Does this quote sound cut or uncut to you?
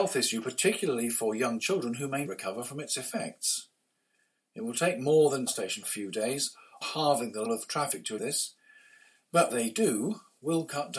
cut